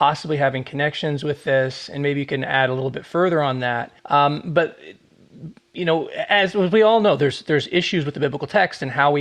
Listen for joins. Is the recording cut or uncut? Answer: cut